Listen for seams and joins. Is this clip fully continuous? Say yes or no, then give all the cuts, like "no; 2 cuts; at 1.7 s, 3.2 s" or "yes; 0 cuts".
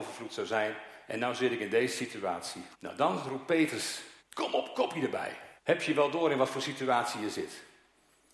no; 3 cuts; at 2.7 s, 4.2 s, 5.6 s